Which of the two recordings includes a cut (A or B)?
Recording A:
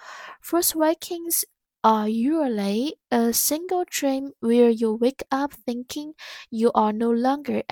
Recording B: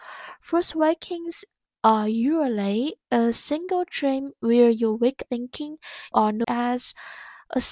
B